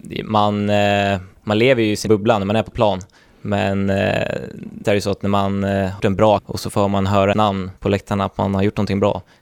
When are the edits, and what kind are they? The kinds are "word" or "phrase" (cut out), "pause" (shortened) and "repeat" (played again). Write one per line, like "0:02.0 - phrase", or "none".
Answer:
0:01.4 - pause
0:02.1 - word
0:04.8 - word
0:06.0 - word
0:06.4 - word
0:07.3 - word
0:07.8 - pause